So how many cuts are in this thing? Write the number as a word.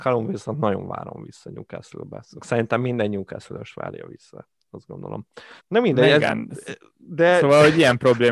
one